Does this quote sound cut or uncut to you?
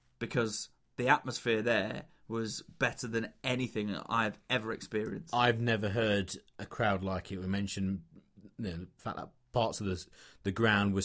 uncut